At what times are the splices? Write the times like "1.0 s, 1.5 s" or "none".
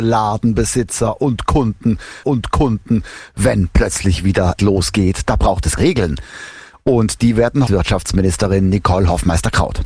2.2 s, 4.6 s, 5.8 s, 7.7 s